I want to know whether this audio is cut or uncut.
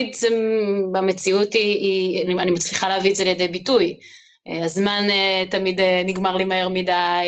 uncut